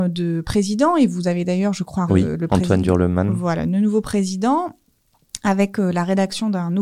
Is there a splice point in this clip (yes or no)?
yes